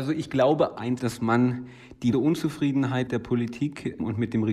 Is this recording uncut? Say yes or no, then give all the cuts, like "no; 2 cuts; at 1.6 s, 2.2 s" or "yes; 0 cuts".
no; 3 cuts; at 1.0 s, 2.1 s, 3.1 s